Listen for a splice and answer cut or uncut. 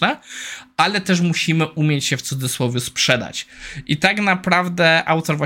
uncut